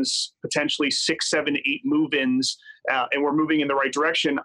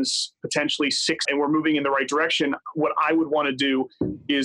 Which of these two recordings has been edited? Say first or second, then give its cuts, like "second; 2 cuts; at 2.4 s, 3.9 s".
second; 1 cut; at 1.2 s